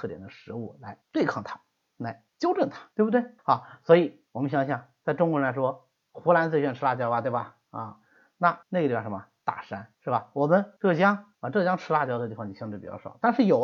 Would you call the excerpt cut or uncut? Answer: cut